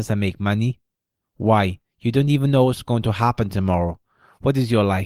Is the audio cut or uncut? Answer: uncut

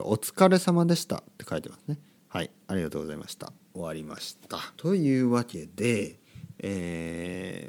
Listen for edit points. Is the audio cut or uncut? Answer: cut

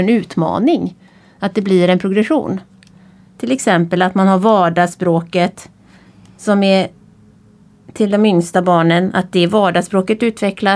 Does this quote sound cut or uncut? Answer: uncut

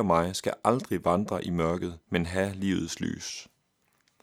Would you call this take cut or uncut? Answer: cut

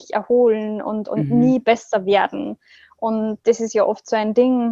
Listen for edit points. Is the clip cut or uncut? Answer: uncut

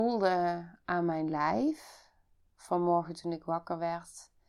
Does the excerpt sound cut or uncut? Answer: uncut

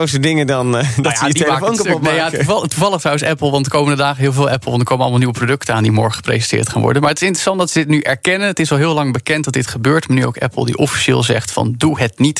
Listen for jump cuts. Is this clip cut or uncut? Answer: uncut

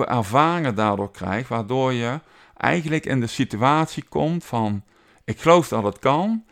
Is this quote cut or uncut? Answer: uncut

